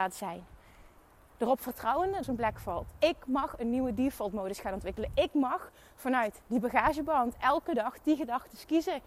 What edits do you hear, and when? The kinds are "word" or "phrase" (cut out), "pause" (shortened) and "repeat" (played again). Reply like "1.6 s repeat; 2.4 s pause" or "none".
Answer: 2.2 s phrase